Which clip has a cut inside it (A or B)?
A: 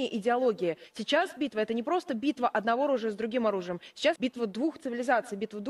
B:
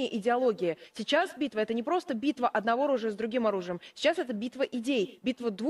A